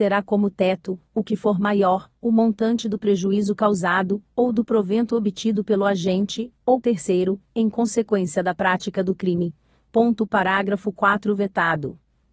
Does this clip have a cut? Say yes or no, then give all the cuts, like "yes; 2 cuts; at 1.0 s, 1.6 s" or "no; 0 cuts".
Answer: yes; 1 cut; at 6.8 s